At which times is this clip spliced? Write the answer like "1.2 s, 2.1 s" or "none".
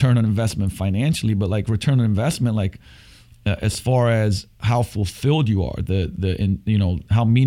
none